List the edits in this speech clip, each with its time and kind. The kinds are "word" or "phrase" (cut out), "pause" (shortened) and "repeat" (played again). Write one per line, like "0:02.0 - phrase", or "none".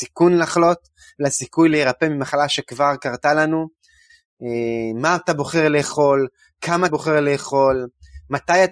0:06.9 - word